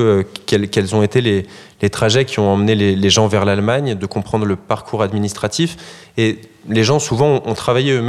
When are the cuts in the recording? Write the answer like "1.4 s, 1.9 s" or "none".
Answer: none

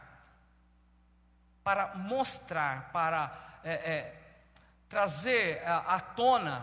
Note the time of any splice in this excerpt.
none

